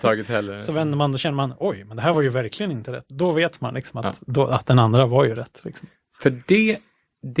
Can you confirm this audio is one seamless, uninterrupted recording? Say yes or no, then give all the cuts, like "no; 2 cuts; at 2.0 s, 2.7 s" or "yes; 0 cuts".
yes; 0 cuts